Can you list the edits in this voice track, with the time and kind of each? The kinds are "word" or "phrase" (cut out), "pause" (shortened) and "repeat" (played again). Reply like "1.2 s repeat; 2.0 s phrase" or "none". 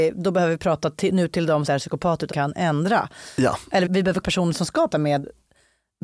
1.7 s phrase; 2.3 s word; 3.9 s phrase; 4.2 s word; 4.9 s word